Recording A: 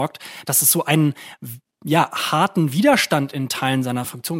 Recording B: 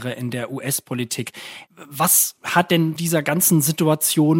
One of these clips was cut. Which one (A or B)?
B